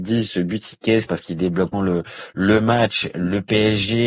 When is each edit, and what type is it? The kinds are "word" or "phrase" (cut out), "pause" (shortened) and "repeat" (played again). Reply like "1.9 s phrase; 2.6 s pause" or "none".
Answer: 1.1 s phrase; 1.7 s word